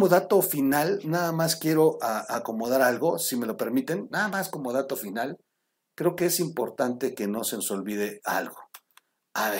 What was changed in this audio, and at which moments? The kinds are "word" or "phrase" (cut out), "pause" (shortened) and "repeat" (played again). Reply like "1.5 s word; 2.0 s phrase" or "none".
none